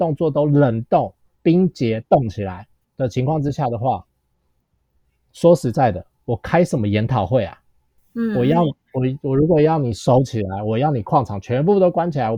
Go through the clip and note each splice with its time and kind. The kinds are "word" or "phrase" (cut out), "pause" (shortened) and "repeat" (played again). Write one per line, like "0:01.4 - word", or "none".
0:02.8 - word